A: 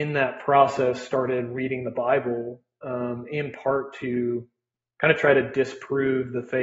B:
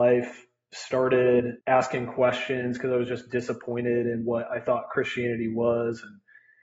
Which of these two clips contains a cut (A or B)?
B